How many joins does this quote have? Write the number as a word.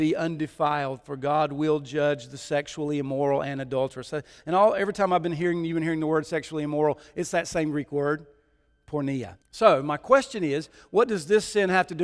one